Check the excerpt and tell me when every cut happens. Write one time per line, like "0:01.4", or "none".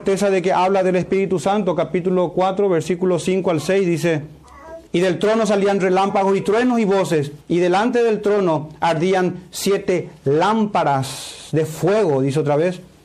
0:04.9
0:07.4